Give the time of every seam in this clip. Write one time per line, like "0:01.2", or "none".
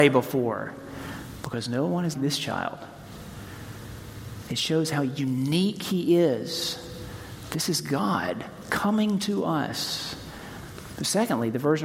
0:02.1